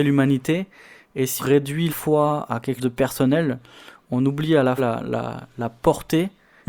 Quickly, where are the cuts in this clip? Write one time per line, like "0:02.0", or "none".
0:01.4
0:01.9
0:02.8
0:04.8

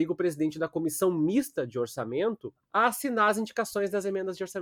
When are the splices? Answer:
0:02.6

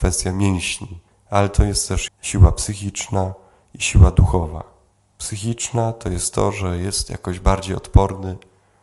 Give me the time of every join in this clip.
0:01.1
0:02.1
0:04.9

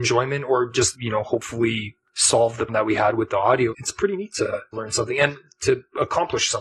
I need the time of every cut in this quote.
0:00.9
0:02.7
0:03.7
0:04.7

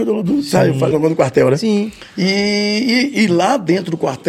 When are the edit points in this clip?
0:00.9

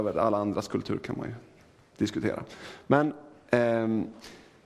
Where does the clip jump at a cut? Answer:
none

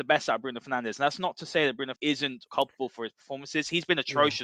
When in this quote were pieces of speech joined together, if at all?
0:01.9
0:02.5

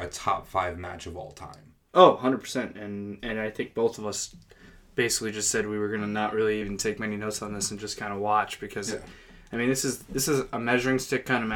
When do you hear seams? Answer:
none

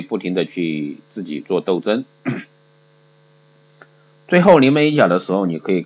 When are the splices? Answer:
none

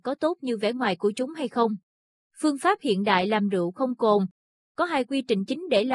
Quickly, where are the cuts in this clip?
none

